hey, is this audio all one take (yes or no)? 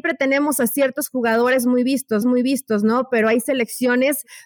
no